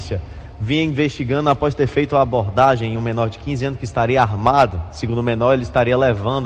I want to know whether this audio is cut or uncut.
uncut